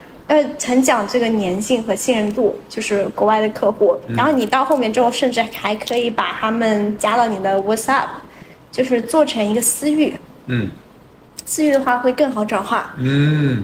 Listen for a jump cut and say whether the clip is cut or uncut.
uncut